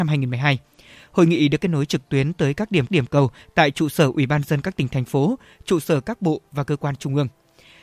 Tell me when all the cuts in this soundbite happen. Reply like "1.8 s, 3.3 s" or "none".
2.9 s